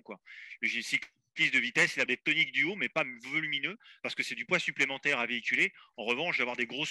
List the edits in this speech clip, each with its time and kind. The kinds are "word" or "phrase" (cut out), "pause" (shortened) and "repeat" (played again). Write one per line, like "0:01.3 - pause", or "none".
0:02.1 - word